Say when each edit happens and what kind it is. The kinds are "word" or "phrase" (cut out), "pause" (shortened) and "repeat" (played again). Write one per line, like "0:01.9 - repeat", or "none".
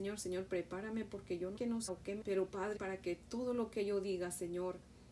0:01.6 - word
0:01.9 - word
0:02.2 - phrase
0:02.8 - word

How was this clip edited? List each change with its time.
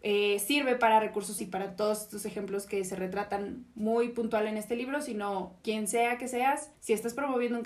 0:01.4 - word
0:05.6 - pause
0:06.7 - pause

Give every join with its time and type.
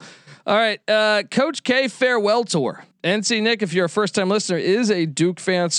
0:02.9 - pause

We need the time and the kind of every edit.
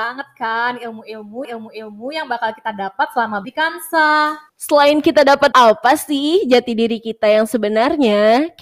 0:01.4 - repeat
0:03.4 - word
0:04.5 - pause
0:05.5 - word

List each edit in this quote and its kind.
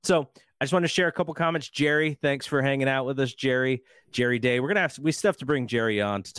none

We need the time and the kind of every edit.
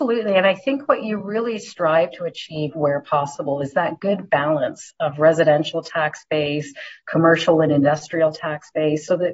none

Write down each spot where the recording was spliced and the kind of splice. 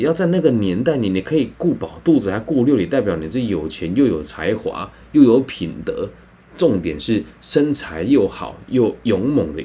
none

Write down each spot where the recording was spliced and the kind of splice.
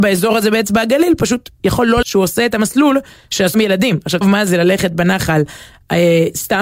0:02.0 - word
0:03.5 - word
0:04.2 - word

